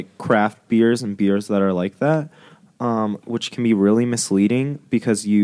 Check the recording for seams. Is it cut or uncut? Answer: uncut